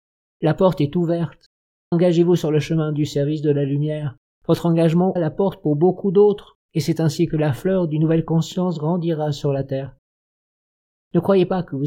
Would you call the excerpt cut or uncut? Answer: cut